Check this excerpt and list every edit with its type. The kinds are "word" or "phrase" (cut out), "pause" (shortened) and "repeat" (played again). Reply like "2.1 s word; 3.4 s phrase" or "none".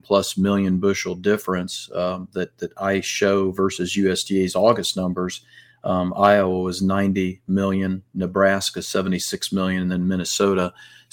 none